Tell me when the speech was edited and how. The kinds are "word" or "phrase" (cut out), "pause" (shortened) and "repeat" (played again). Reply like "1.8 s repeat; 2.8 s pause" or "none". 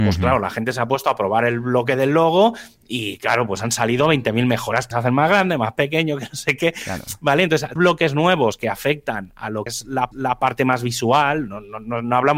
4.9 s phrase; 7.8 s phrase; 9.7 s word; 10.1 s repeat